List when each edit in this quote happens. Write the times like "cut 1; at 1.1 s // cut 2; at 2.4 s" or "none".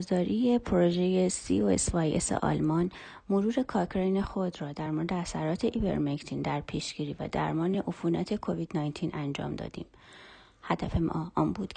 none